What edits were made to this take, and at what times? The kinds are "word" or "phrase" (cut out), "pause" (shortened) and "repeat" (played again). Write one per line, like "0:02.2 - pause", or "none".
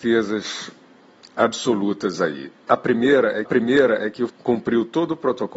0:02.6 - pause
0:03.5 - repeat
0:04.3 - word